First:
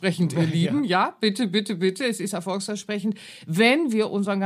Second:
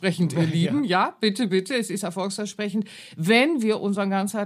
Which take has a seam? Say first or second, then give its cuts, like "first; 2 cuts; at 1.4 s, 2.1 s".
second; 1 cut; at 1.5 s